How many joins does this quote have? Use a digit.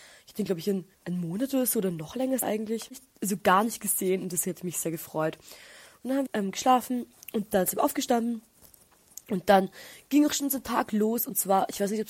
3